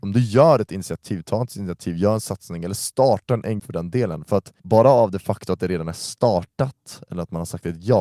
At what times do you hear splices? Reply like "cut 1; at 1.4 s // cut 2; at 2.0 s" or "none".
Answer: cut 1; at 3.6 s // cut 2; at 4.6 s